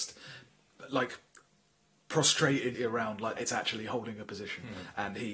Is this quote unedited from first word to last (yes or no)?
no